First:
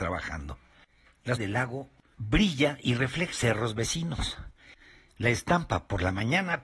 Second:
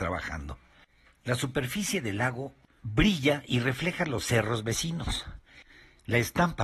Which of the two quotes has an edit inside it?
first; 2 cuts; at 1.4 s, 3.3 s

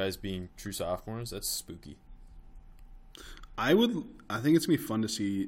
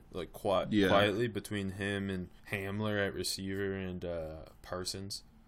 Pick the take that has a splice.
second; 1 cut; at 2.4 s

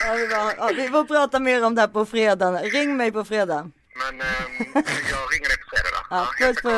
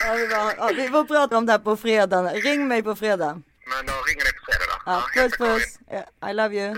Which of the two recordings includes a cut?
second; 2 cuts; at 1.3 s, 3.9 s

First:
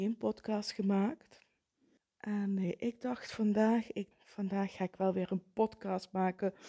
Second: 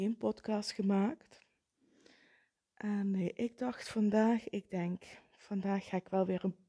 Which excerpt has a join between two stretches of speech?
first; 2 cuts; at 2.0 s, 4.1 s

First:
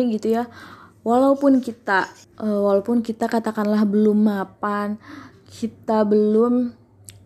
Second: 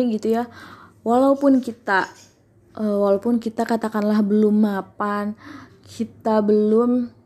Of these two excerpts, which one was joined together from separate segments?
first; 1 cut; at 2.2 s

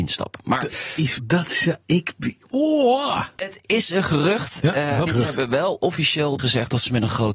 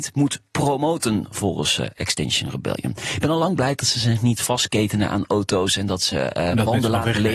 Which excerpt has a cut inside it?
first; 3 cuts; at 1.2 s, 5.1 s, 6.4 s

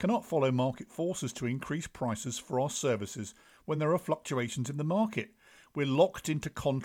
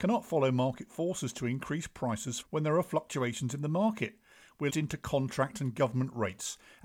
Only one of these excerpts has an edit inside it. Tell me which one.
second; 2 cuts; at 2.4 s, 4.7 s

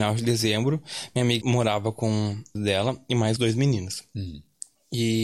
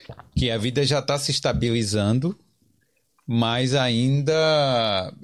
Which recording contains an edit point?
first; 3 cuts; at 1.4 s, 2.6 s, 3.4 s

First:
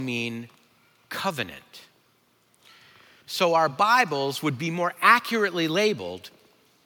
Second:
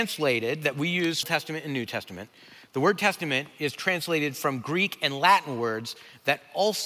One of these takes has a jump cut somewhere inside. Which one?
second; 1 cut; at 1.2 s

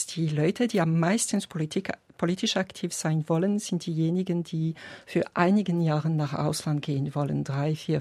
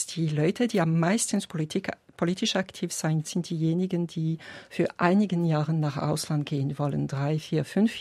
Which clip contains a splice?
second; 1 cut; at 3.2 s

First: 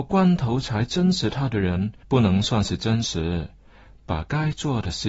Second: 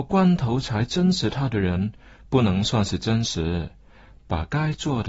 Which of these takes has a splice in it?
first; 1 cut; at 2.0 s

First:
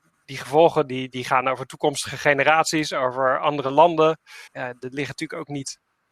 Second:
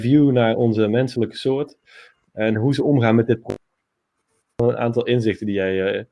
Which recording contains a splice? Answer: first; 1 cut; at 4.5 s

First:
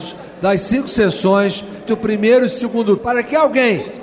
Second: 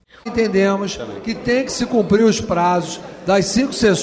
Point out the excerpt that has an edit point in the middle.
first; 2 cuts; at 1.9 s, 3.0 s

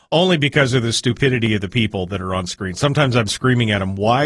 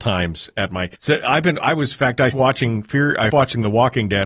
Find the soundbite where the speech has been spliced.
second; 3 cuts; at 0.9 s, 2.3 s, 3.3 s

